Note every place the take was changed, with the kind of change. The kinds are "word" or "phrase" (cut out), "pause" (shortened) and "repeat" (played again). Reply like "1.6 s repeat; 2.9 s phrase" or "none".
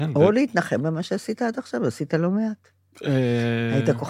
none